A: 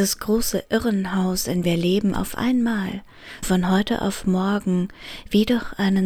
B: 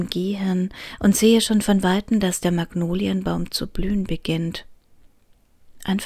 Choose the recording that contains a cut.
A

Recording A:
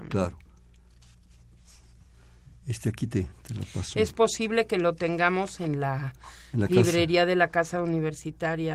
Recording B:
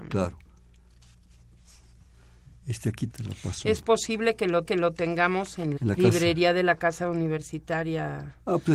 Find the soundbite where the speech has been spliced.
B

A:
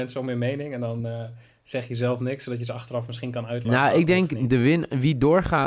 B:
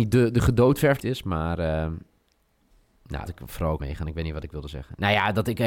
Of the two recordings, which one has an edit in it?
B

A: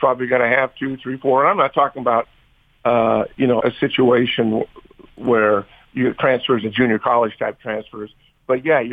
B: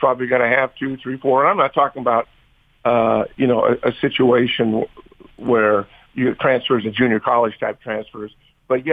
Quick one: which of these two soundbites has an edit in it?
A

